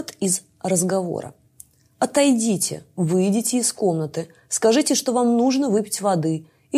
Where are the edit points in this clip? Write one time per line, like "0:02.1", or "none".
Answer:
none

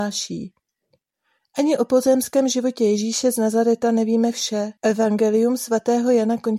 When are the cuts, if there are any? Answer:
0:04.8

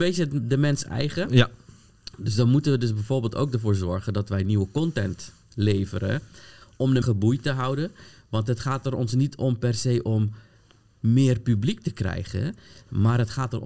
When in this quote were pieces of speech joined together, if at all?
0:07.0

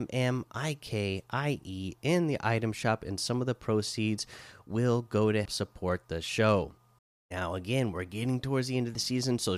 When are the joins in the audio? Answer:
0:05.4
0:07.0

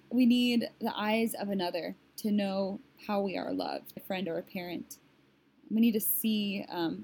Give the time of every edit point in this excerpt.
0:04.0

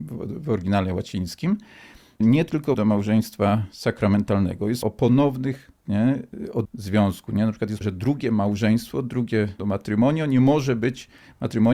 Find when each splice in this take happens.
0:02.2
0:02.7
0:04.8
0:05.9
0:06.7
0:07.8
0:09.6

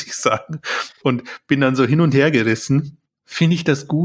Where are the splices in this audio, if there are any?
none

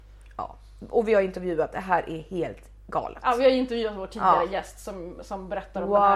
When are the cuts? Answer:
none

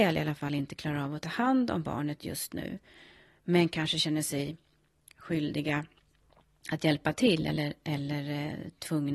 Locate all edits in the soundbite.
none

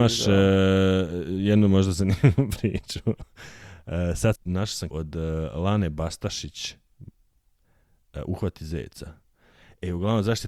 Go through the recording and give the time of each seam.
0:04.4
0:04.9

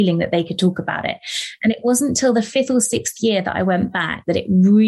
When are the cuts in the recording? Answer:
none

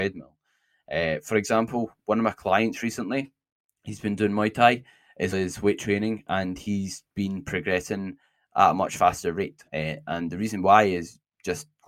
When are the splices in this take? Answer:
0:03.7
0:05.3
0:09.7

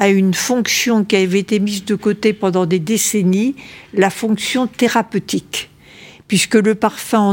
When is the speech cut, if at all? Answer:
none

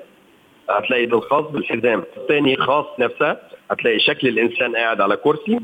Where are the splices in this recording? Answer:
0:01.1
0:02.2
0:03.0

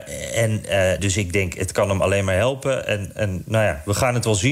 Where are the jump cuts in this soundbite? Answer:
0:01.0

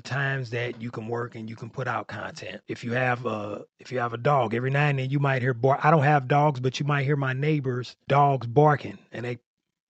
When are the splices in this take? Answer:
0:03.7

